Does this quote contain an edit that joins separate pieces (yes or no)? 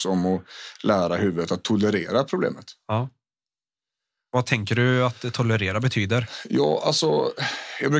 no